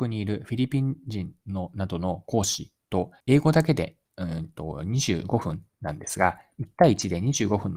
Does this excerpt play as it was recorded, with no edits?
no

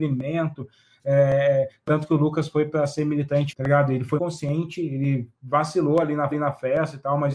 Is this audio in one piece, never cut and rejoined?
no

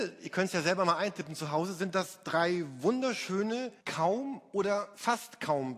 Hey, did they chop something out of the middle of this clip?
yes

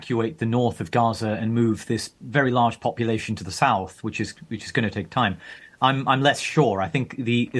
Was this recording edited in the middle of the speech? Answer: no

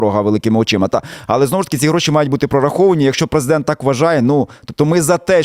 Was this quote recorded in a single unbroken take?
yes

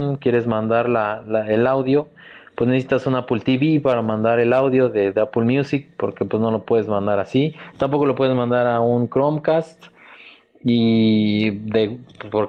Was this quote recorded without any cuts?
yes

